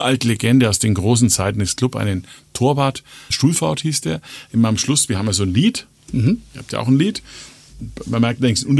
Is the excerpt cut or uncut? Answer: cut